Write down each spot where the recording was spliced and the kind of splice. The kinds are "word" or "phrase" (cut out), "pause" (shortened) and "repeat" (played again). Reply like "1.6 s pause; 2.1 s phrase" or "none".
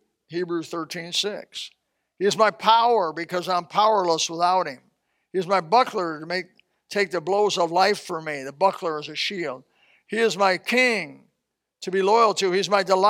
none

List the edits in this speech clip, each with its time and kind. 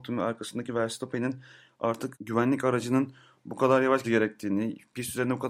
4.0 s word

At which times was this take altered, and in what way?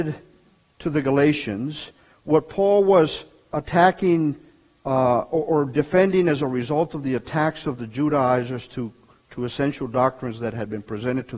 2.0 s pause

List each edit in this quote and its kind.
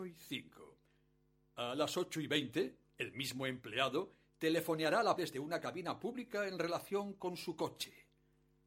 5.2 s word

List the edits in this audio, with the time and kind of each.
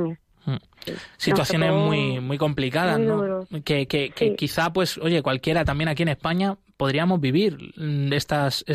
1.1 s pause

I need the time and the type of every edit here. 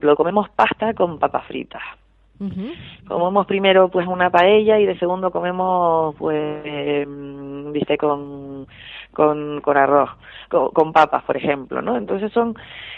none

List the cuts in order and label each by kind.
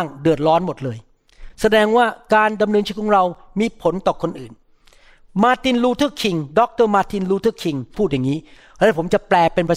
none

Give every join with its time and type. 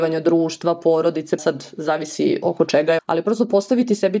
1.4 s word; 2.4 s word; 3.0 s word

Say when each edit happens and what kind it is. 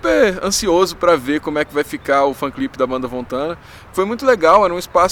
none

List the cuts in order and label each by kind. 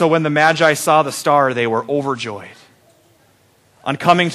none

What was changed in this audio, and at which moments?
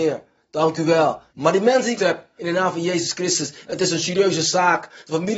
1.3 s pause; 2.0 s word; 2.4 s phrase

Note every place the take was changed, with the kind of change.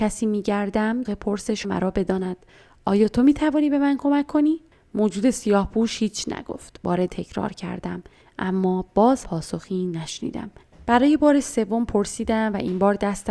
1.0 s phrase; 1.6 s word; 7.1 s phrase; 9.2 s word

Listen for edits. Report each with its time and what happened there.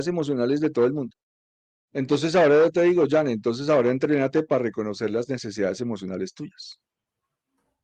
1.7 s pause

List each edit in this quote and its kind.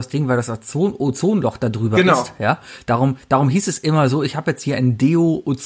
none

